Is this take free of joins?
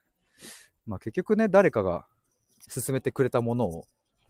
no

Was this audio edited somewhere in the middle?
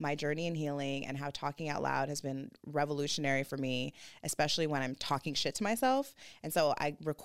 no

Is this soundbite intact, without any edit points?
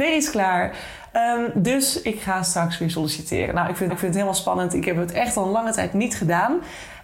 no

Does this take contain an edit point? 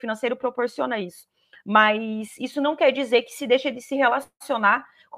no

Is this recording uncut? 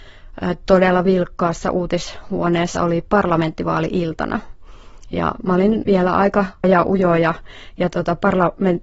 no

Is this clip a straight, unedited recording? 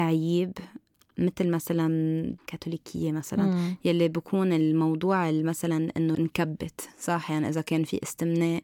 no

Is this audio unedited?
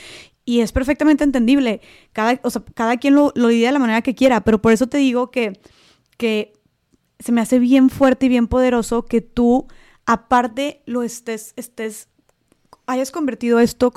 yes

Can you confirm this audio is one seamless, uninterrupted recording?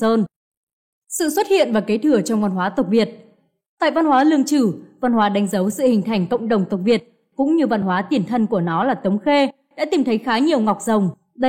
yes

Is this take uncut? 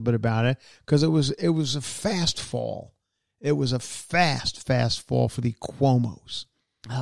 yes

